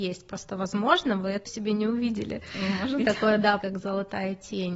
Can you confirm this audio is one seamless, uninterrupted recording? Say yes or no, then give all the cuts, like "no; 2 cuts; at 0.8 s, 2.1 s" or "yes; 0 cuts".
no; 3 cuts; at 1.4 s, 3.0 s, 3.6 s